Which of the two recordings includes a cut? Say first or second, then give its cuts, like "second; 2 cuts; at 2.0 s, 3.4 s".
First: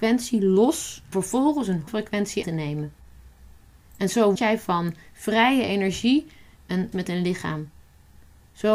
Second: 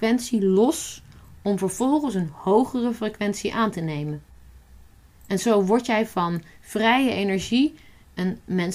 first; 5 cuts; at 1.1 s, 1.9 s, 2.4 s, 4.4 s, 6.9 s